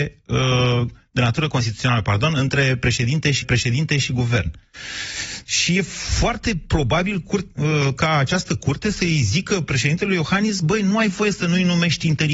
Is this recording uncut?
no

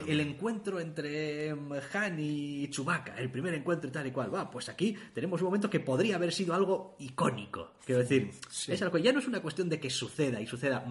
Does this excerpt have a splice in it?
no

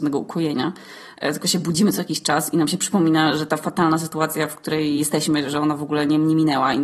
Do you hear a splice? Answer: no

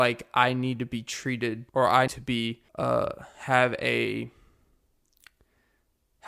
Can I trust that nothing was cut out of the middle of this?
no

